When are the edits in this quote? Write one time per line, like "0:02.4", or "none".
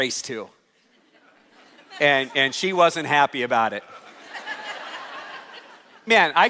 none